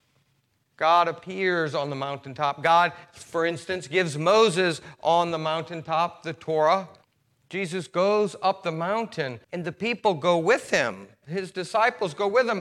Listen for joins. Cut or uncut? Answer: cut